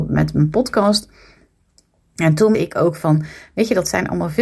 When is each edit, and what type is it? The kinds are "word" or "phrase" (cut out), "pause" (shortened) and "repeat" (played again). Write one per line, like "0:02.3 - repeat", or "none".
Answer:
0:02.5 - word